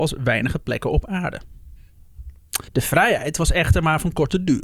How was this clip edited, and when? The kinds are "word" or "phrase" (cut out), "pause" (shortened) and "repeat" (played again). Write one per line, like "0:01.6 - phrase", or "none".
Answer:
0:02.7 - pause